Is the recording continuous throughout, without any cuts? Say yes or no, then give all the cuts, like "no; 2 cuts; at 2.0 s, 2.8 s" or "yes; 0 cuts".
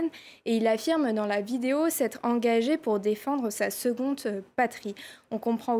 yes; 0 cuts